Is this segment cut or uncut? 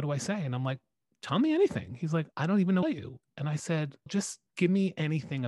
cut